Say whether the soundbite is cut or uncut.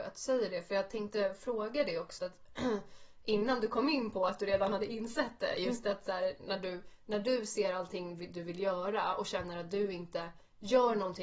cut